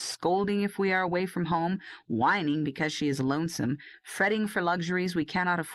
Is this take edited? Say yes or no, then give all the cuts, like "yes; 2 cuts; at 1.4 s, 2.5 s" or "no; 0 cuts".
no; 0 cuts